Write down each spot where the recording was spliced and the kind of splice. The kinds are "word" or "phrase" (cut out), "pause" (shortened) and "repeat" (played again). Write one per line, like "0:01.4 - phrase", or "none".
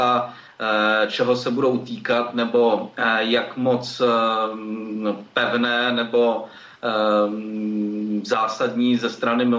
none